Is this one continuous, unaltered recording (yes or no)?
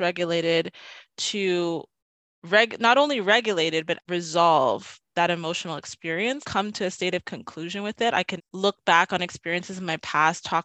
no